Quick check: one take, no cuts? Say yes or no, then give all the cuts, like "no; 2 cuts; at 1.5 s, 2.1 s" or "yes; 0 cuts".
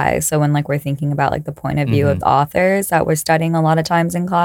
no; 1 cut; at 2.2 s